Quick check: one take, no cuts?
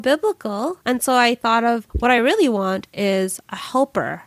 yes; 0 cuts

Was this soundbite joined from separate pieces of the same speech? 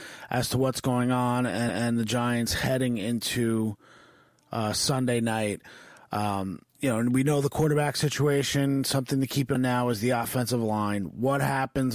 yes; 3 cuts; at 1.7 s, 6.7 s, 9.5 s

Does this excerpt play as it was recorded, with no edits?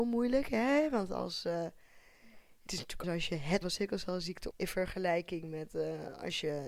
no; 4 cuts; at 2.7 s, 3.0 s, 3.6 s, 4.5 s

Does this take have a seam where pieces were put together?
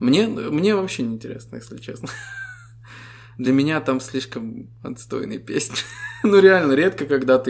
no; 0 cuts

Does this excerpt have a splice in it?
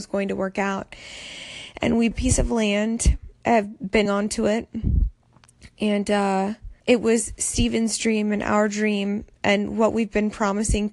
yes; 5 cuts; at 2.1 s, 3.4 s, 4.1 s, 6.8 s, 9.3 s

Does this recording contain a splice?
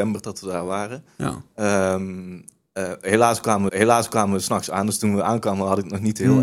yes; 1 cut; at 3.7 s

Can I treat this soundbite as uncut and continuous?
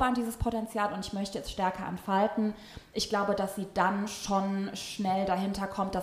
yes; 0 cuts

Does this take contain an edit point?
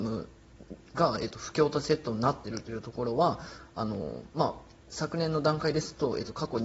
yes; 1 cut; at 4.8 s

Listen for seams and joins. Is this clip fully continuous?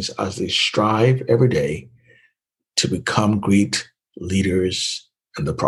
yes; 0 cuts

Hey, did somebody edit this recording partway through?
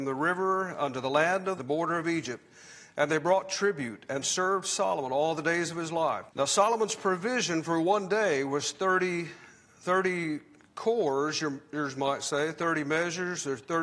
yes; 2 cuts; at 1.6 s, 6.3 s

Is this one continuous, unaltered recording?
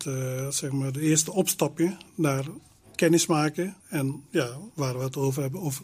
no; 1 cut; at 3.8 s

